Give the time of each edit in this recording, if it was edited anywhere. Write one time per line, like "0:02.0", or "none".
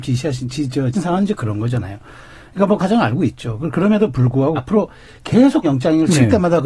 0:00.9
0:02.8
0:04.6
0:05.6